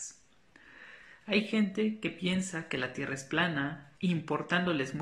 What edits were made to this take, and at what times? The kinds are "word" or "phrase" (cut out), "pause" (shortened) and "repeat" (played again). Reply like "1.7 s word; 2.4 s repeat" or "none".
3.9 s pause